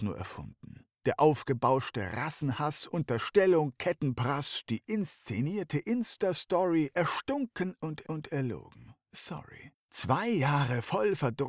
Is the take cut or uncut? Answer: cut